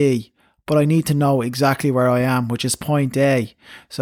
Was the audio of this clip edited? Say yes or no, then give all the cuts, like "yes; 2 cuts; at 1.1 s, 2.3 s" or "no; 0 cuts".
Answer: no; 0 cuts